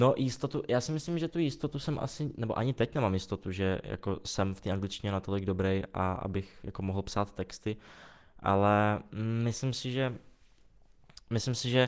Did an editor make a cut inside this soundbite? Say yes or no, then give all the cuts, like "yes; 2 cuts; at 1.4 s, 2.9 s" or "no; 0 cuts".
no; 0 cuts